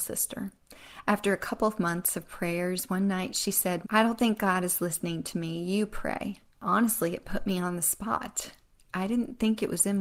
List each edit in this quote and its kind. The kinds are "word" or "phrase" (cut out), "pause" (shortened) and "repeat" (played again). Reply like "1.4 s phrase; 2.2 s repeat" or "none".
3.8 s word; 6.5 s pause